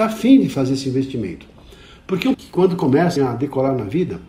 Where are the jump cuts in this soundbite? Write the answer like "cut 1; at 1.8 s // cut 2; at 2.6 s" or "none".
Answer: cut 1; at 2.3 s // cut 2; at 3.2 s